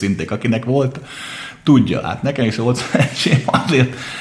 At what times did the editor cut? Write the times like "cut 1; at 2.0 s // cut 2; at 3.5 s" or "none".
none